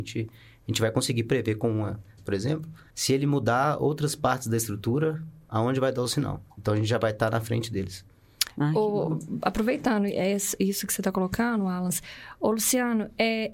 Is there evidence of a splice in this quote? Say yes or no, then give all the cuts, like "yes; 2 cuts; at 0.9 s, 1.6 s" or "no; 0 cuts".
yes; 3 cuts; at 2.2 s, 2.9 s, 6.5 s